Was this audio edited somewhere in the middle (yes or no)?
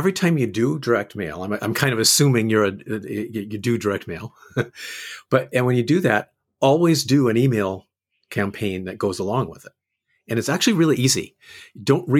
no